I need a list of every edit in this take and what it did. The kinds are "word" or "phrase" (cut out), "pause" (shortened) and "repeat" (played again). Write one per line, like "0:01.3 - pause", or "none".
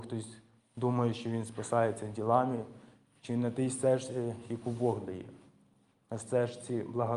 none